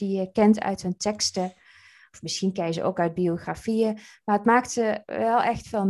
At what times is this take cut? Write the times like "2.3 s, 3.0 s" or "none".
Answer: none